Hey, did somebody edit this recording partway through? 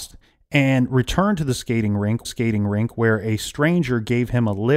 yes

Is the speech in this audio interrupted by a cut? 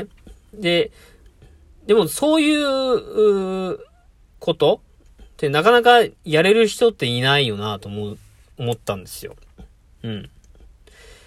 no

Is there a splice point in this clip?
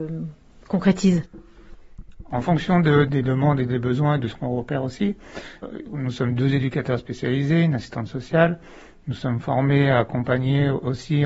no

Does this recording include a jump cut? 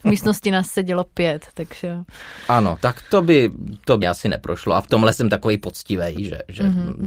yes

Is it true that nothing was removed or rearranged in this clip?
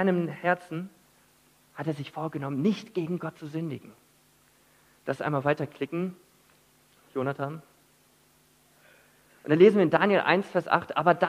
yes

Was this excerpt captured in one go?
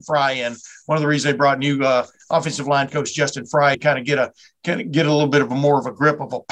no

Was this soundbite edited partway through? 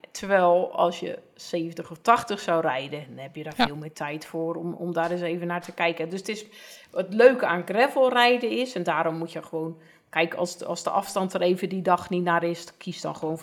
no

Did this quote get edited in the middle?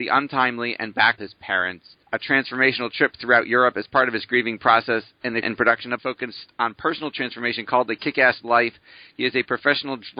yes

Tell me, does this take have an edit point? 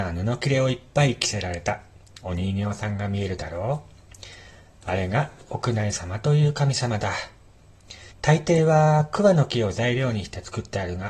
yes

